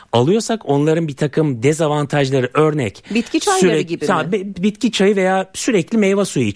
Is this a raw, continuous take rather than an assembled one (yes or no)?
yes